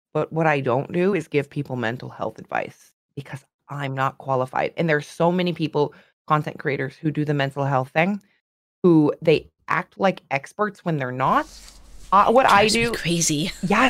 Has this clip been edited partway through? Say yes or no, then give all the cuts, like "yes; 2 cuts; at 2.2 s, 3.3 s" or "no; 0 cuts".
no; 0 cuts